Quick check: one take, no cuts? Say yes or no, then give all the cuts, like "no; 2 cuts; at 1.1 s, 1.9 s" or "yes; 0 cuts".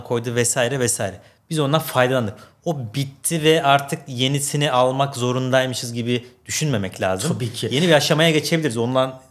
yes; 0 cuts